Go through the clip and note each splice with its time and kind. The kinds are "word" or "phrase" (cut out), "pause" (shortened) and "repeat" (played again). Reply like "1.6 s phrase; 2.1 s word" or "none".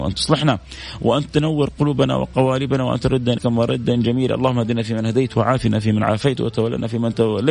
3.4 s word